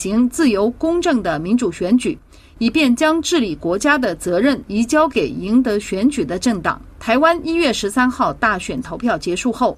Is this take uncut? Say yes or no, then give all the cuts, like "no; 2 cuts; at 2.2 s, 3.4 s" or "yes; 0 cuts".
yes; 0 cuts